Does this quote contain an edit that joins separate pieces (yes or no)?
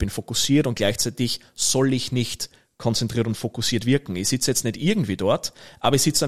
no